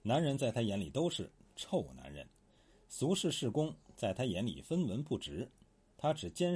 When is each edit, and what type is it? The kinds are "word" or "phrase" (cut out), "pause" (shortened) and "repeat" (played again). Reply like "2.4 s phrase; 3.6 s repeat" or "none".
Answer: none